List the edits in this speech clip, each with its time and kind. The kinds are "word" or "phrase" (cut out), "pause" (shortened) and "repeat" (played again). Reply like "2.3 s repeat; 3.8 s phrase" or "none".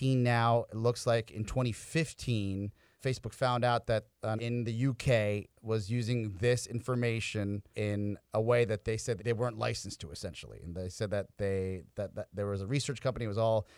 3.0 s word; 4.4 s word; 7.7 s word; 9.2 s word